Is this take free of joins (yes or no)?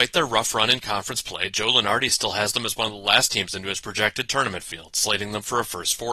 yes